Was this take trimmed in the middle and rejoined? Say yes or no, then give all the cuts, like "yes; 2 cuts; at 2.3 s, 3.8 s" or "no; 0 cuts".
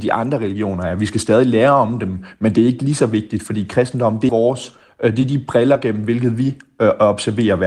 yes; 1 cut; at 4.3 s